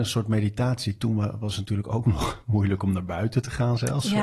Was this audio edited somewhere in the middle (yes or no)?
no